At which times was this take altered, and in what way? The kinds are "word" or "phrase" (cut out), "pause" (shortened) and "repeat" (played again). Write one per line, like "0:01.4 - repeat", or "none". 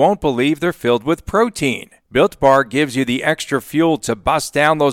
none